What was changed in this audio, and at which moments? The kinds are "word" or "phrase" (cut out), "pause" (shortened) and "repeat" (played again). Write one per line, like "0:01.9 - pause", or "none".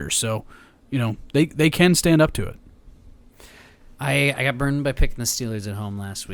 0:03.9 - pause